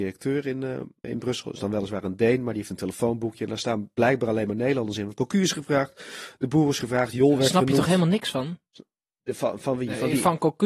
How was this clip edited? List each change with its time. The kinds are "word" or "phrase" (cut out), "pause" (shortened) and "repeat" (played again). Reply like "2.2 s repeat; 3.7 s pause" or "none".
1.0 s word